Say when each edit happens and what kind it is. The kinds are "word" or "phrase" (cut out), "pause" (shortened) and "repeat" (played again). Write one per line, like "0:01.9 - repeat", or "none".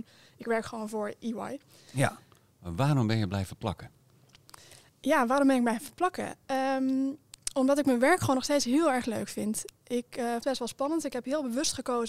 0:04.9 - pause
0:10.4 - phrase